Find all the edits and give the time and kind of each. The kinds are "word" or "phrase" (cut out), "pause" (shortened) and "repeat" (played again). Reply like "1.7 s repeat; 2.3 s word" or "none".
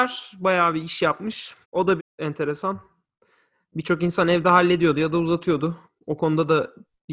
1.6 s pause; 2.0 s word